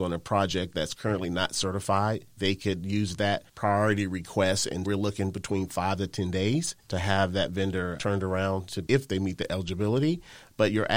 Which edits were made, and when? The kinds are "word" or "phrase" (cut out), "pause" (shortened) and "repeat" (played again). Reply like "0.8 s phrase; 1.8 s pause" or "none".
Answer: 3.5 s pause; 4.8 s word; 6.8 s pause; 8.0 s word; 8.9 s word